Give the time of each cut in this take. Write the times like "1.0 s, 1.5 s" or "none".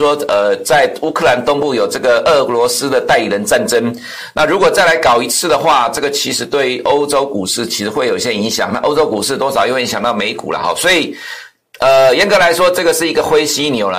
none